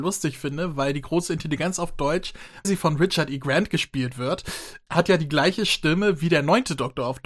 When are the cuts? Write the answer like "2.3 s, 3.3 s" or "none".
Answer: 2.6 s, 4.9 s